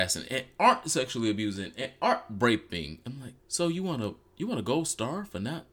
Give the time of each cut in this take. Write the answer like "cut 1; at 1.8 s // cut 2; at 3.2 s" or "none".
cut 1; at 3.4 s